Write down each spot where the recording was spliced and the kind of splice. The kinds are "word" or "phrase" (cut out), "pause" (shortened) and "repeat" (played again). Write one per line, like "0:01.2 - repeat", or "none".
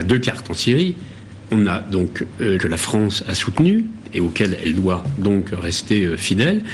0:02.6 - phrase